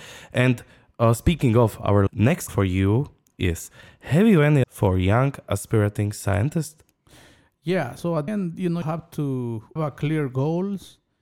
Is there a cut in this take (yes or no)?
yes